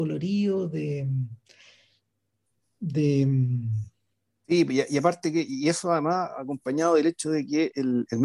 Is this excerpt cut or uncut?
uncut